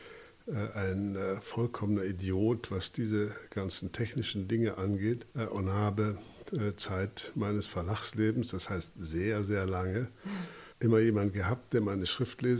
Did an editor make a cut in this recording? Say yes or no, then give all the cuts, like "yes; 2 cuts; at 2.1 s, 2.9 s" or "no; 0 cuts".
yes; 2 cuts; at 5.3 s, 10.7 s